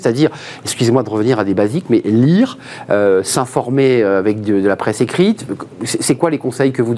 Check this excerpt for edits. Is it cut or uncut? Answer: uncut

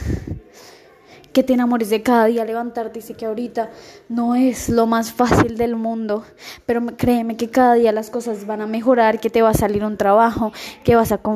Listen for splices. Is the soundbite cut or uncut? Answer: uncut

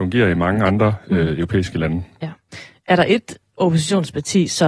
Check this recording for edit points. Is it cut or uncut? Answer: uncut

